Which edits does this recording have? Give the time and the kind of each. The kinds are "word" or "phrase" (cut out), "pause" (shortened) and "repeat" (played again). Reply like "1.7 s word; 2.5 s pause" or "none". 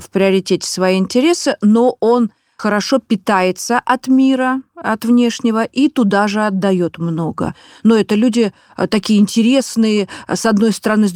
2.6 s word